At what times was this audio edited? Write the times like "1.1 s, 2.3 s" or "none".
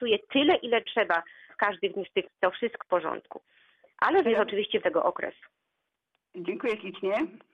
1.5 s, 2.3 s, 2.8 s, 4.2 s, 4.8 s